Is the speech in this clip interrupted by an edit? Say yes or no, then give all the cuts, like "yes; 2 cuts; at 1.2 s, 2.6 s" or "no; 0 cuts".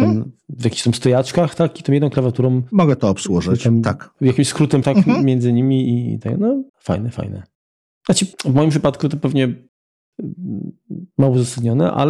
yes; 3 cuts; at 4.8 s, 6.7 s, 8.3 s